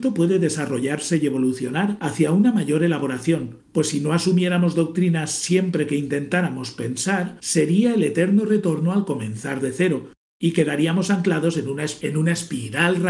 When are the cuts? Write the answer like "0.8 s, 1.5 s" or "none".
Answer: none

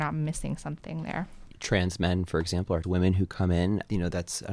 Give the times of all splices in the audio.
1.5 s, 2.8 s

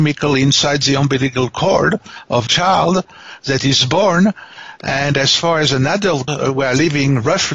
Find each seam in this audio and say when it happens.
2.5 s, 6.3 s

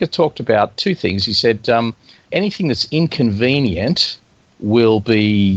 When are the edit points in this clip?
none

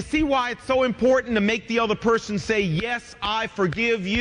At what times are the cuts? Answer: none

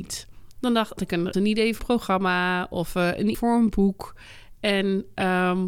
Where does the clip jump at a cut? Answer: 1.0 s, 1.3 s, 1.8 s, 3.3 s

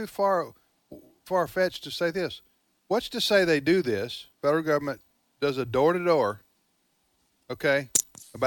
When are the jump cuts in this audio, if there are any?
4.3 s

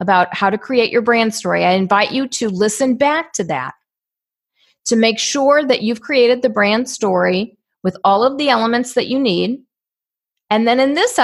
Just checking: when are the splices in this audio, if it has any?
none

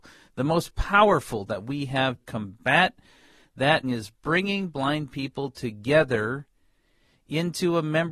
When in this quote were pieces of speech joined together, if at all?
1.5 s, 2.2 s, 3.8 s

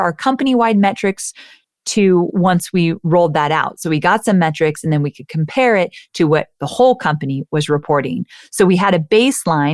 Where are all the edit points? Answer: none

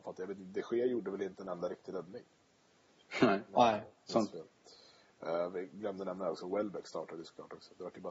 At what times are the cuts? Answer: none

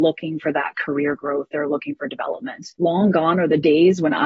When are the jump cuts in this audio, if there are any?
2.8 s

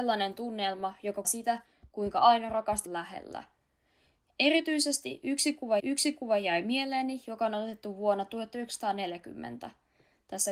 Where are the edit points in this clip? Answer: 1.2 s, 2.9 s, 5.8 s

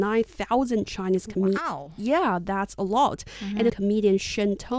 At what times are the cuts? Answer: 3.7 s

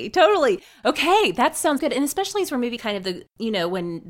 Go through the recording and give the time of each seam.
1.8 s, 2.8 s

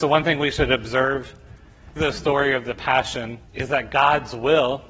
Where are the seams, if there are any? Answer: 2.0 s, 3.5 s

